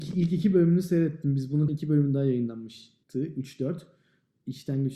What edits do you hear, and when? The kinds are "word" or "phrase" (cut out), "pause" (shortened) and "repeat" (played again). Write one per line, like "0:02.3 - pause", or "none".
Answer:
0:01.7 - word
0:03.0 - pause